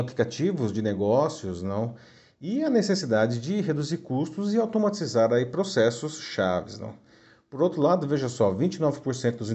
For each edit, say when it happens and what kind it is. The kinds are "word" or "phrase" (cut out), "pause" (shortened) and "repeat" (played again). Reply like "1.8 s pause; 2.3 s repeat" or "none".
none